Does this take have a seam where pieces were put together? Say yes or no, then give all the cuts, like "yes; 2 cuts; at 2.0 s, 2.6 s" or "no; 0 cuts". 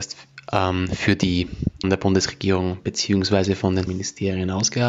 yes; 2 cuts; at 1.8 s, 3.9 s